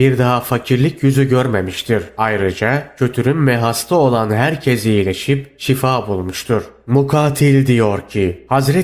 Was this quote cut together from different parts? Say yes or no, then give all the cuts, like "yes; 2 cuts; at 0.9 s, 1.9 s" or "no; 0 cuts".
no; 0 cuts